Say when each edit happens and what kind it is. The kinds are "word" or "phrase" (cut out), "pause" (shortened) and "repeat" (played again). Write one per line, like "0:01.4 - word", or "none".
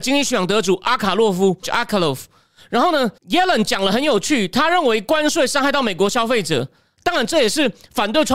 0:01.6 - word
0:03.2 - pause